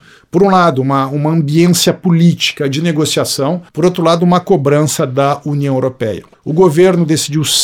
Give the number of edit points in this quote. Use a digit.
2